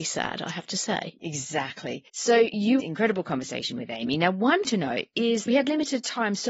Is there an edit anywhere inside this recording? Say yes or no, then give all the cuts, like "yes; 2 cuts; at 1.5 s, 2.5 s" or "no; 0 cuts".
yes; 4 cuts; at 2.1 s, 2.8 s, 4.6 s, 5.5 s